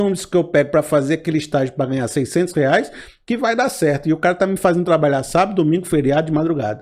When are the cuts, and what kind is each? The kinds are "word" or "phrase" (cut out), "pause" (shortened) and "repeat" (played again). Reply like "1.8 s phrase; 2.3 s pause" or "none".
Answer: none